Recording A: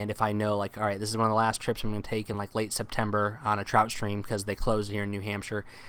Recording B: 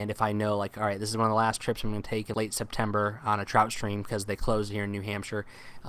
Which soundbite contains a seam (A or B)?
B